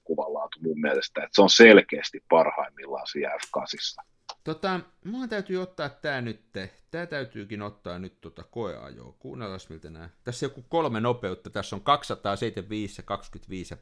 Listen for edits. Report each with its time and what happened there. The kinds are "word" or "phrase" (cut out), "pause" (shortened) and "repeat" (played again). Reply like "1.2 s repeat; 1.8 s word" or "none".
4.4 s pause